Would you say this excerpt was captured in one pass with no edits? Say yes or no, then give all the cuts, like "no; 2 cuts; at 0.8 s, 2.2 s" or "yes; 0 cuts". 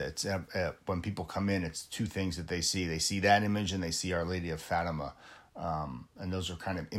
yes; 0 cuts